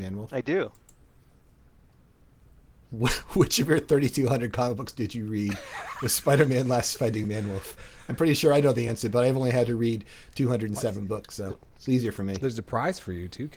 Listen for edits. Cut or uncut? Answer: uncut